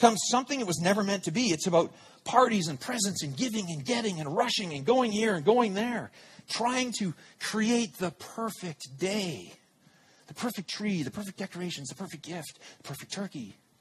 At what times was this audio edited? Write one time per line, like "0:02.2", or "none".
none